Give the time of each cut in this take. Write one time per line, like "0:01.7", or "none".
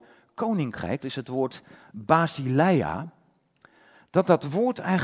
0:01.0

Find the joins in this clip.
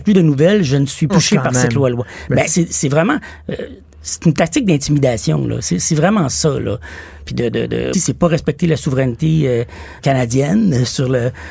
0:01.1
0:02.5
0:04.2
0:07.2
0:07.9
0:10.0

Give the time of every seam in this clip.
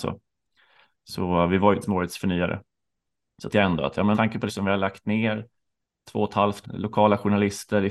0:01.8
0:03.5
0:04.1
0:04.5
0:06.6

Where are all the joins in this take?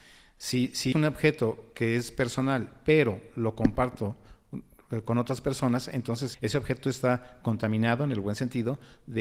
0:00.9
0:06.3

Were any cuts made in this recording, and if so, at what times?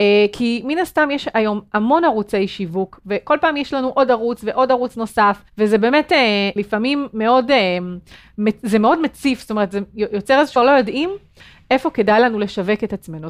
0:05.5
0:06.6
0:10.6

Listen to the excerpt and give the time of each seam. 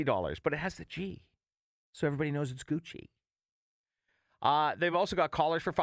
none

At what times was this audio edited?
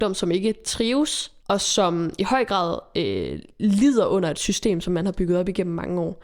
0:01.4

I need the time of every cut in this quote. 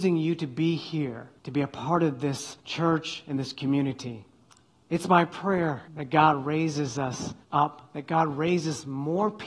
0:01.4
0:02.6
0:04.5
0:05.9
0:07.4

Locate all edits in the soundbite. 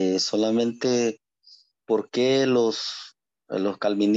none

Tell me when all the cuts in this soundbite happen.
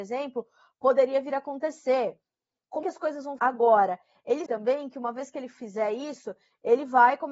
0:02.8
0:03.4
0:04.5

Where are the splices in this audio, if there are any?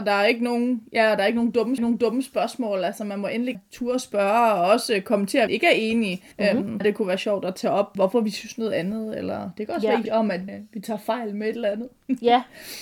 0:01.8
0:03.5
0:05.5
0:06.3
0:06.8
0:08.0
0:10.1
0:10.5

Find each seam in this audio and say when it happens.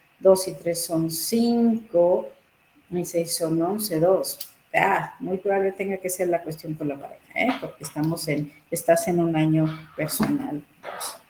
none

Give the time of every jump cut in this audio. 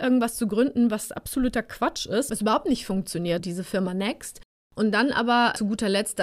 0:03.4

